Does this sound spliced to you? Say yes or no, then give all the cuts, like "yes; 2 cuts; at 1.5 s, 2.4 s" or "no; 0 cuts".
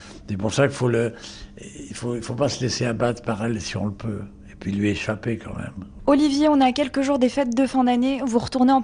no; 0 cuts